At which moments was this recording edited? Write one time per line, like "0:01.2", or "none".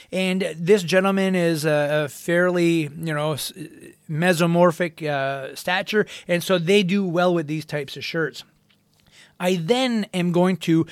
none